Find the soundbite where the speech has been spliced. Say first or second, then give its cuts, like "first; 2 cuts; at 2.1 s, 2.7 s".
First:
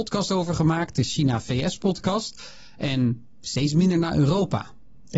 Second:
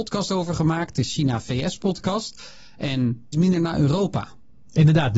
second; 1 cut; at 3.3 s